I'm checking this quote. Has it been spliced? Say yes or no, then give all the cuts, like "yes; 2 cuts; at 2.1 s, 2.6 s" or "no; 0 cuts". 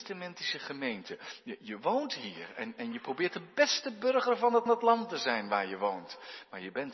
yes; 1 cut; at 4.7 s